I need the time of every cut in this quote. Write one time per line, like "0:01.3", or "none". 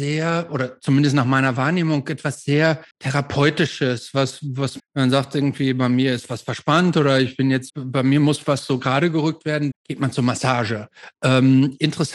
0:02.9
0:04.8
0:07.7
0:09.7